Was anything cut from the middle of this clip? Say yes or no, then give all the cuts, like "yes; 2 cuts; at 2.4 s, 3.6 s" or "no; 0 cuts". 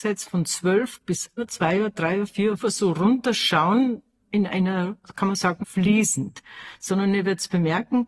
yes; 4 cuts; at 1.4 s, 2.6 s, 4.2 s, 5.6 s